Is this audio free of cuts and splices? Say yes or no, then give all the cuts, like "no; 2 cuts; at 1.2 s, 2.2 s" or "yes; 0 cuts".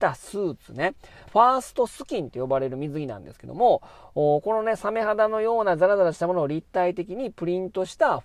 no; 1 cut; at 1.3 s